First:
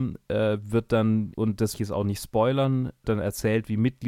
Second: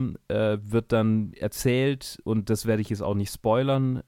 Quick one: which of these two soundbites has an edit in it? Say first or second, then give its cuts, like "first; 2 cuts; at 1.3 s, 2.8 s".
first; 3 cuts; at 1.3 s, 1.7 s, 3.0 s